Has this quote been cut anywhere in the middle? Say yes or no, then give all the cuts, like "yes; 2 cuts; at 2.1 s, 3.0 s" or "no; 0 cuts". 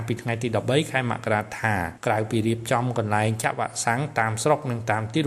yes; 1 cut; at 2.0 s